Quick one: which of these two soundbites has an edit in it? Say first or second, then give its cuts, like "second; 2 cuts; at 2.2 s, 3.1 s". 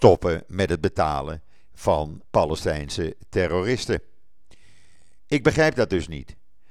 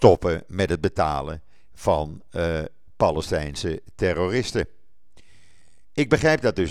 first; 1 cut; at 2.2 s